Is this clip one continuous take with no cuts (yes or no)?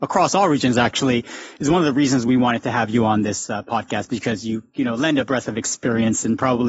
yes